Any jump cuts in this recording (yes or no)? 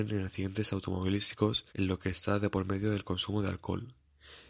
yes